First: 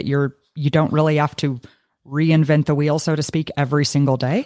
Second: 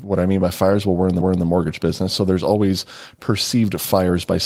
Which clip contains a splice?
second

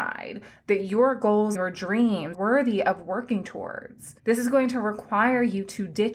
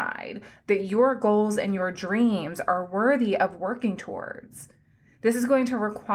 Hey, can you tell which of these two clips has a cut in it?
first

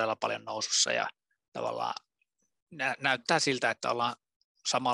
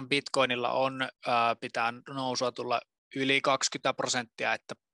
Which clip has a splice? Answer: second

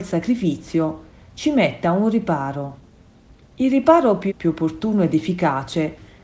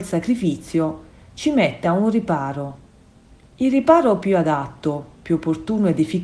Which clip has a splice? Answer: first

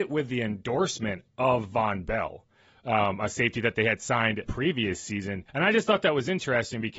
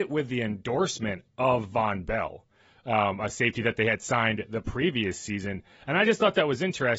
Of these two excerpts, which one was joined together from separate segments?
first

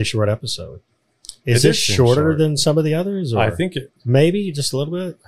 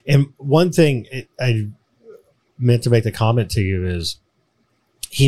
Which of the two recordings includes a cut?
first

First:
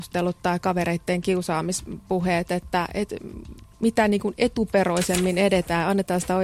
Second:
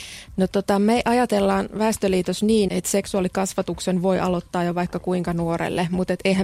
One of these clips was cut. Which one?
second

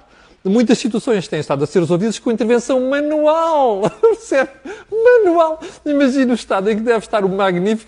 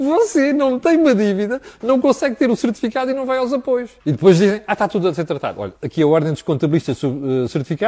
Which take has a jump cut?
second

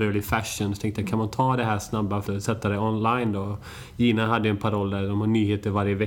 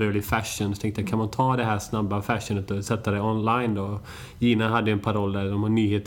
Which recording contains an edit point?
first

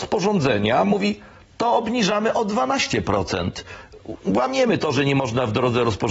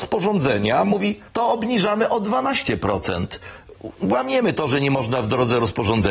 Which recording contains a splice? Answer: second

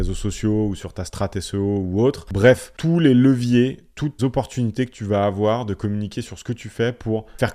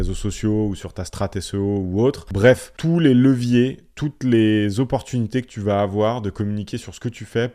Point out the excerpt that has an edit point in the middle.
first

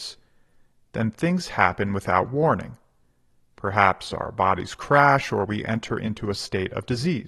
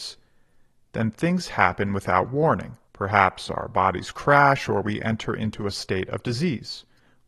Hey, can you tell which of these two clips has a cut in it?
second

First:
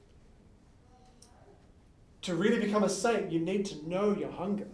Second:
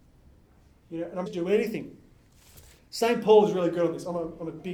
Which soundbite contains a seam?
second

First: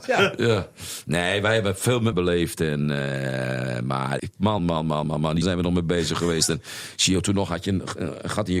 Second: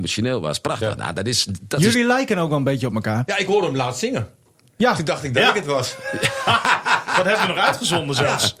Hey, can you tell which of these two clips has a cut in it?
first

